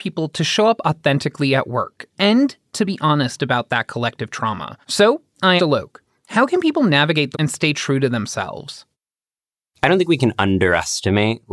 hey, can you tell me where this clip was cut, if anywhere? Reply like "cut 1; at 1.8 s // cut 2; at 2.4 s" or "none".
cut 1; at 4.8 s // cut 2; at 5.6 s // cut 3; at 7.3 s